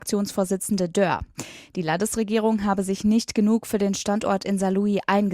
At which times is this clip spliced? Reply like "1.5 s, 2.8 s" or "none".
none